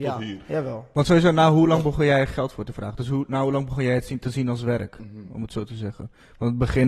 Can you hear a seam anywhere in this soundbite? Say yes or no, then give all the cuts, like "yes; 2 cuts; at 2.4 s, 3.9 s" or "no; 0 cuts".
no; 0 cuts